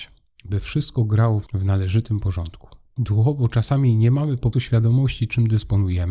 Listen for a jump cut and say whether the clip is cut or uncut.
cut